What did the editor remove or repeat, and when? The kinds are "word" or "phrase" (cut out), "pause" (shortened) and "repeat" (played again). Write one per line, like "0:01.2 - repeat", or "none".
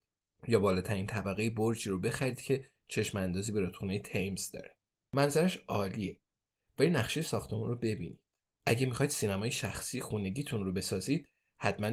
none